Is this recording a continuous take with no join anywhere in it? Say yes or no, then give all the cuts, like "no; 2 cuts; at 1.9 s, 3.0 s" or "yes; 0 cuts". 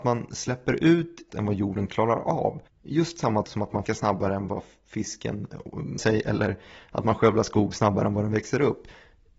no; 5 cuts; at 1.3 s, 2.7 s, 3.4 s, 3.9 s, 6.0 s